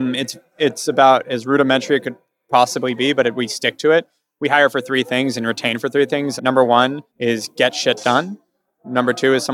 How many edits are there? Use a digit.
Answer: 2